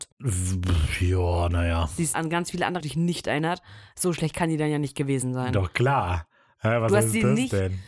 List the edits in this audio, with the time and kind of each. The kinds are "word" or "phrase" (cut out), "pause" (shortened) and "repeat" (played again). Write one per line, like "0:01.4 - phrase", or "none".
0:02.1 - word
0:02.8 - word